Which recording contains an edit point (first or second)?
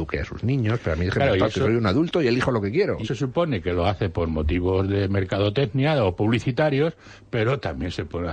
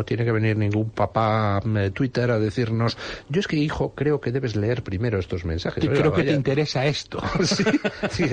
first